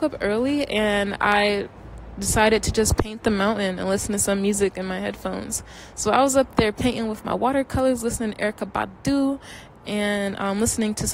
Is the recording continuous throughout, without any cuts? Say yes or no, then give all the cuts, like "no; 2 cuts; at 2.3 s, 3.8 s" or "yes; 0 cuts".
no; 1 cut; at 7.2 s